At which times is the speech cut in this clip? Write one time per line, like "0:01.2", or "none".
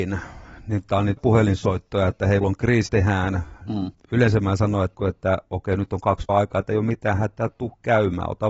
0:01.2
0:02.4
0:02.9
0:04.9
0:06.3